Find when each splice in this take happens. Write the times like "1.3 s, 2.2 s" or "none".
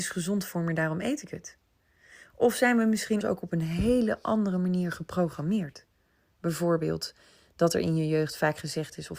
3.2 s